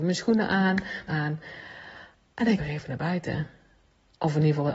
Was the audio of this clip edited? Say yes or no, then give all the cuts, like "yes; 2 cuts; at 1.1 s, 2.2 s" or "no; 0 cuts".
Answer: yes; 2 cuts; at 1.1 s, 2.6 s